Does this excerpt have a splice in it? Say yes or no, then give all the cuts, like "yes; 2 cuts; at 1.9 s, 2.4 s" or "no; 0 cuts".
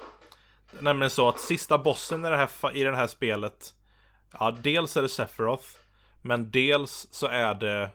no; 0 cuts